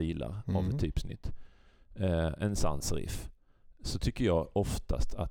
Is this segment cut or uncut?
uncut